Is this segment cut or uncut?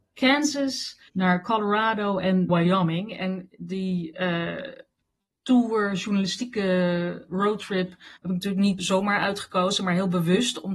cut